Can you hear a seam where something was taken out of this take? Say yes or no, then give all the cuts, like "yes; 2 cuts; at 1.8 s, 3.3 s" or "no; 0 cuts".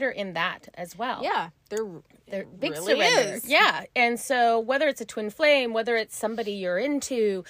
no; 0 cuts